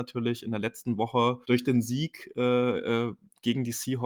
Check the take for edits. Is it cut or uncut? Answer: cut